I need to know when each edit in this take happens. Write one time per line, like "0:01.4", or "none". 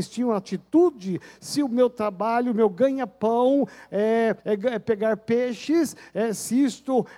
0:04.4